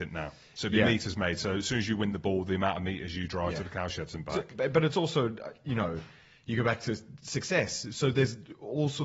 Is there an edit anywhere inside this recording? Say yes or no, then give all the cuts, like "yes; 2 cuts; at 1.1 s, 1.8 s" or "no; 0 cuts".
no; 0 cuts